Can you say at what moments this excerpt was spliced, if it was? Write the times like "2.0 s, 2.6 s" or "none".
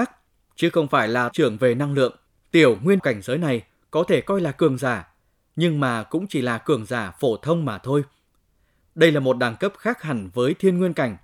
1.3 s, 2.3 s, 3.0 s